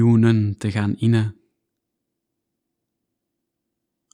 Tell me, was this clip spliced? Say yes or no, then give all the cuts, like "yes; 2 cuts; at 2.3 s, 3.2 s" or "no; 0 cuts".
no; 0 cuts